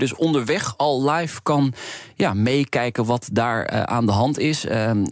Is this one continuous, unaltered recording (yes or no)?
yes